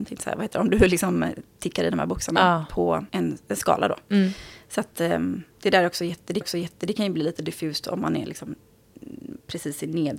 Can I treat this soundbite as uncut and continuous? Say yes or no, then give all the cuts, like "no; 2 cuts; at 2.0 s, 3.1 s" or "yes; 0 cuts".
no; 3 cuts; at 3.1 s, 5.5 s, 6.4 s